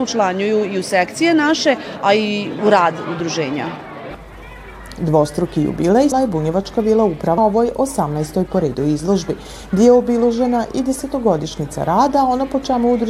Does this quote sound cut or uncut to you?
cut